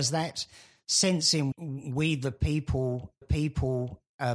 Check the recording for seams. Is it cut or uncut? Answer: cut